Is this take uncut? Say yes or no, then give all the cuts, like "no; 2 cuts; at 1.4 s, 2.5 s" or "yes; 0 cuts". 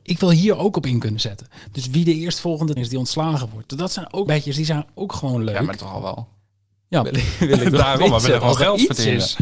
no; 4 cuts; at 2.8 s, 4.3 s, 5.8 s, 7.0 s